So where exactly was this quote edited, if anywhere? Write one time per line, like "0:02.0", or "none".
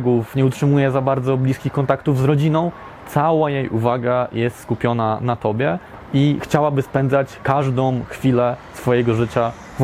none